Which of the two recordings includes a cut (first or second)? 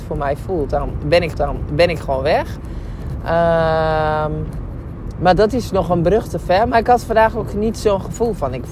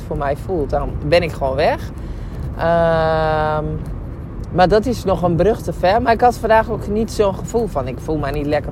first